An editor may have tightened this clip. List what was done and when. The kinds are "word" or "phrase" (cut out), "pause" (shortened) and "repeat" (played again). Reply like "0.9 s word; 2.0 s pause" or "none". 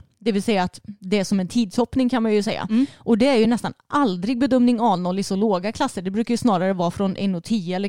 none